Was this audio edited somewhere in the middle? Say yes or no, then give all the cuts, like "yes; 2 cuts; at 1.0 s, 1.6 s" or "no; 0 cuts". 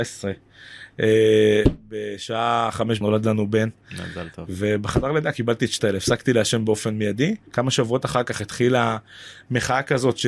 yes; 3 cuts; at 3.0 s, 5.8 s, 7.5 s